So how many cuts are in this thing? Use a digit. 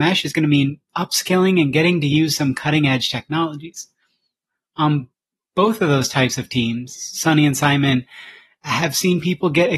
0